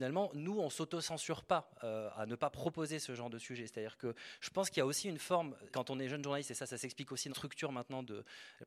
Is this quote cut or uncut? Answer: cut